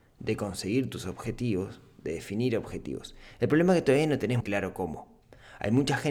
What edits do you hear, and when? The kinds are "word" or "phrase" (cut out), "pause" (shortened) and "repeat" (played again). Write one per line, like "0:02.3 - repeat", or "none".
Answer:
0:04.4 - word